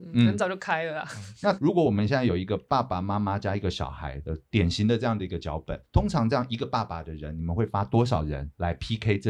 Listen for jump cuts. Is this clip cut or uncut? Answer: cut